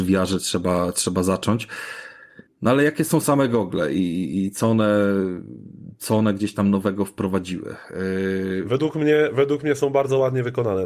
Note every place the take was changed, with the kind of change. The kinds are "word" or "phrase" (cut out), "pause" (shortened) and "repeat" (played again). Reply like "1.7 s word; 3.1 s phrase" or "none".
2.5 s pause